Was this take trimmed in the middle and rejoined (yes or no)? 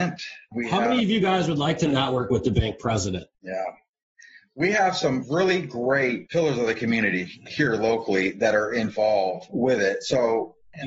yes